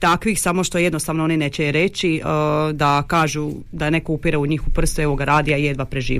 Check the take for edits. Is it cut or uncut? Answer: uncut